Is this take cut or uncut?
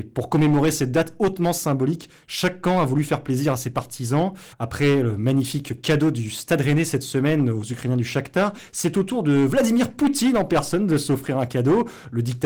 cut